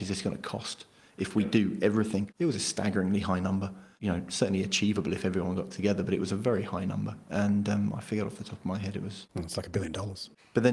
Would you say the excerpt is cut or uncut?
uncut